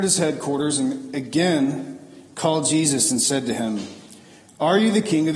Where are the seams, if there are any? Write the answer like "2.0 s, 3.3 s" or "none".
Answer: none